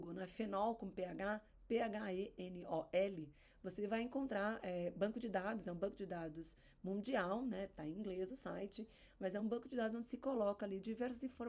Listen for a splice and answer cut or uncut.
uncut